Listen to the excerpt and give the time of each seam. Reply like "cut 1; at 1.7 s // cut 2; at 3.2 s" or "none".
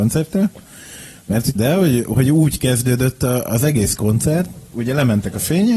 cut 1; at 1.6 s // cut 2; at 4.7 s